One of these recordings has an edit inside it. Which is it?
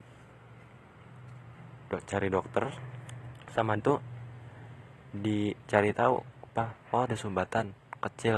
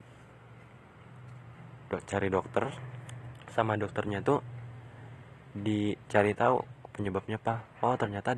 first; 3 cuts; at 3.8 s, 6.5 s, 7.1 s

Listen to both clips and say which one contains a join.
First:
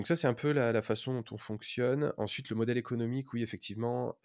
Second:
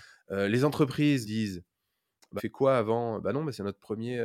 second; 2 cuts; at 1.2 s, 2.4 s

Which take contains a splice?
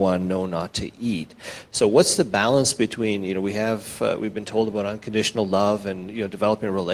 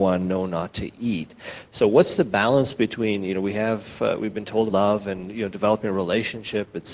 second; 1 cut; at 4.7 s

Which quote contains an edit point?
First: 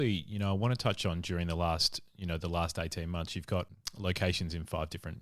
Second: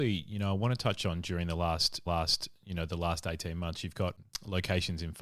second; 1 cut; at 2.1 s

